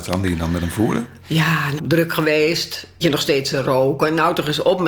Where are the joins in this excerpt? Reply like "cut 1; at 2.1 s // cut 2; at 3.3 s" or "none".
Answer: cut 1; at 1.8 s // cut 2; at 3.0 s